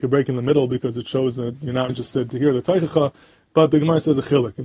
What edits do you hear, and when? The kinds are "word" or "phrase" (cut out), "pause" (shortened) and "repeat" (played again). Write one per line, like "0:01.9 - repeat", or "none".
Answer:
0:01.9 - word